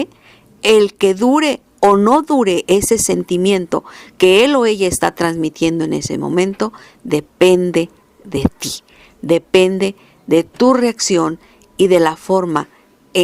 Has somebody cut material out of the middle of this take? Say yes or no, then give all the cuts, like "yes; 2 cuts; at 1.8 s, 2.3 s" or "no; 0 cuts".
no; 0 cuts